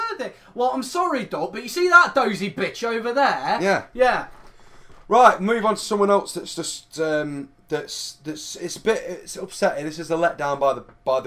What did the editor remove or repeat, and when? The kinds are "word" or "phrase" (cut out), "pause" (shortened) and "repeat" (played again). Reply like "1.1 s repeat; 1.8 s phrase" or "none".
none